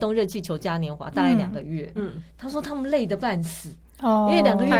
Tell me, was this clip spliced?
yes; 1 cut; at 2.0 s

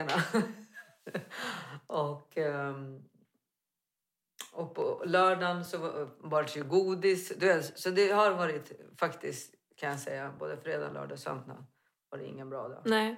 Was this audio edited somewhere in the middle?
no; 0 cuts

